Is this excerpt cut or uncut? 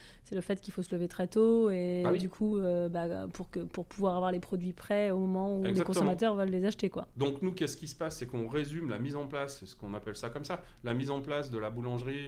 uncut